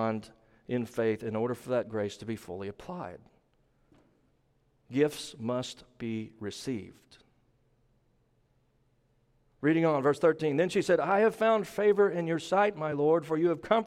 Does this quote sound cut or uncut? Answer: uncut